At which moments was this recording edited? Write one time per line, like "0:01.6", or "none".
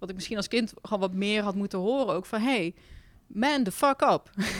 0:03.1